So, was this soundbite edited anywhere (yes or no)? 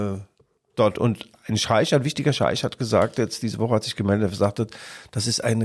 yes